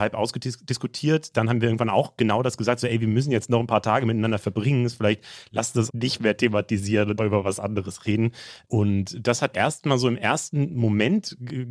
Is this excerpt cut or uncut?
cut